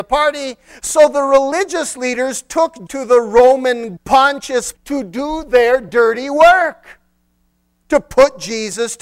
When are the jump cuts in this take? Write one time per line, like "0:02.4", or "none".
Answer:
0:02.9
0:04.0
0:04.7